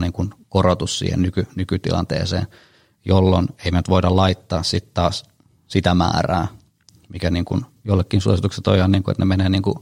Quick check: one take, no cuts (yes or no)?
no